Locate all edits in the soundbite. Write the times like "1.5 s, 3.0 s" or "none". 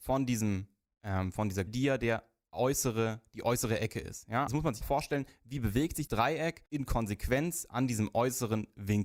1.7 s, 4.5 s, 4.8 s, 6.1 s, 6.7 s